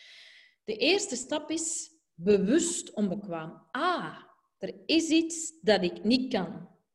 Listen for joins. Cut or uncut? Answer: uncut